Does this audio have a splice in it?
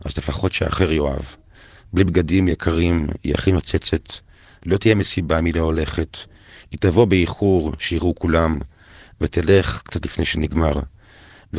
no; 0 cuts

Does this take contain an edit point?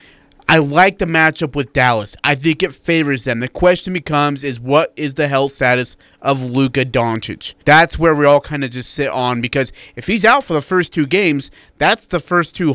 yes; 1 cut; at 7.6 s

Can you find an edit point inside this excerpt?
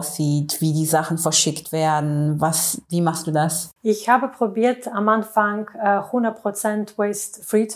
yes; 1 cut; at 3.8 s

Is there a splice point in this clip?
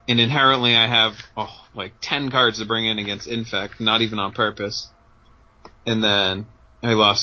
no; 0 cuts

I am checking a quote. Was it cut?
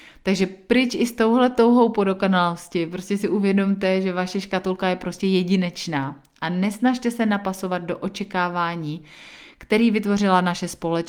no; 0 cuts

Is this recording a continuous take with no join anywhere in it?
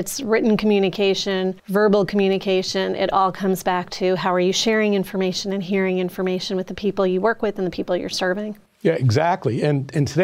no; 1 cut; at 1.6 s

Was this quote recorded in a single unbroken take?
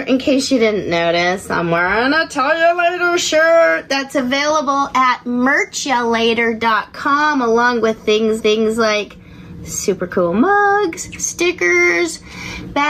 no; 1 cut; at 8.4 s

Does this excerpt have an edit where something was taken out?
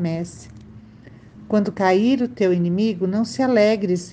no; 0 cuts

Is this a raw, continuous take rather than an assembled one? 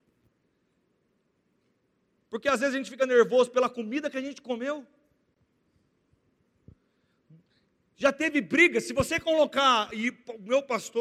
yes; 0 cuts

